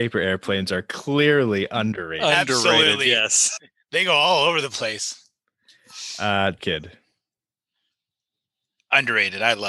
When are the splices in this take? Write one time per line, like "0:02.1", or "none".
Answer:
0:06.6